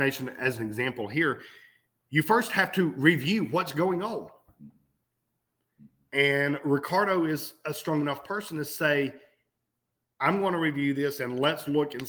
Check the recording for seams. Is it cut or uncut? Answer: uncut